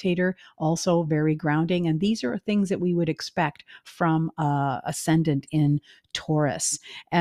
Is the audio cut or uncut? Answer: uncut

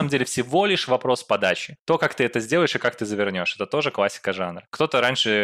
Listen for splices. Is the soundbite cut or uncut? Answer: uncut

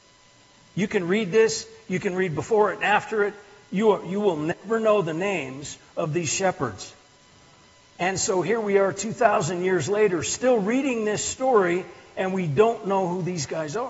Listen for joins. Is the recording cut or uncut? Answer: uncut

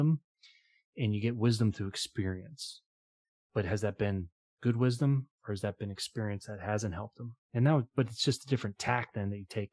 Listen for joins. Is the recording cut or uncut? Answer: uncut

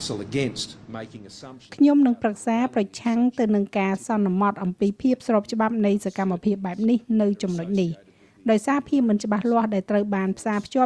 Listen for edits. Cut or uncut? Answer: uncut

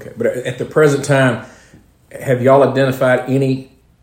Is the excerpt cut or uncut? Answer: uncut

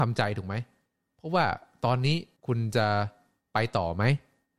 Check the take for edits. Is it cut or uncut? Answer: cut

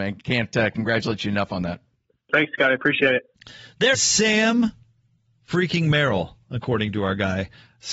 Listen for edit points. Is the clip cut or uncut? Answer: cut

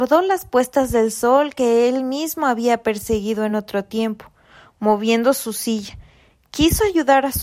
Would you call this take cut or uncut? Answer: uncut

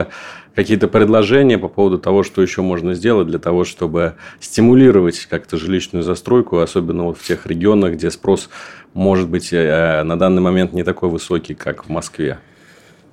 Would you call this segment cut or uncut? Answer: uncut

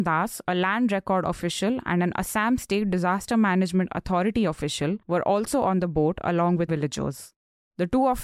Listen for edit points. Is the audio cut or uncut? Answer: cut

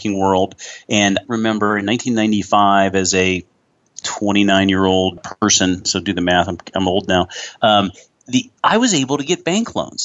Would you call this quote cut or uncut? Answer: cut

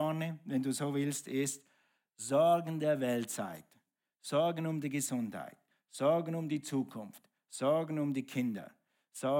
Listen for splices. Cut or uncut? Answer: uncut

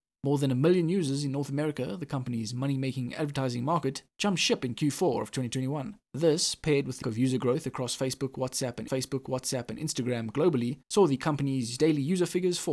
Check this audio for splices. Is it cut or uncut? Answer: cut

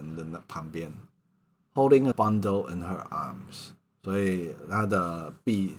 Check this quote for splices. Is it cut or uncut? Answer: cut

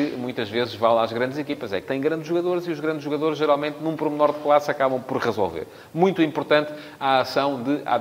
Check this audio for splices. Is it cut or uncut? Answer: uncut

